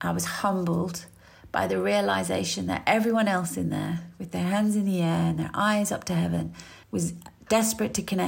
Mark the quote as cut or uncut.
cut